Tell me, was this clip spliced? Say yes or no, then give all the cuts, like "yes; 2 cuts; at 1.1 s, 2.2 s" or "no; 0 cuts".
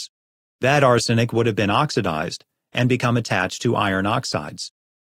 no; 0 cuts